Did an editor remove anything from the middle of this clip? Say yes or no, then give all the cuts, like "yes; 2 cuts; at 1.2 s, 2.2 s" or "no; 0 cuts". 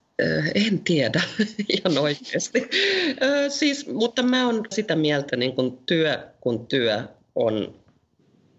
yes; 2 cuts; at 4.7 s, 5.3 s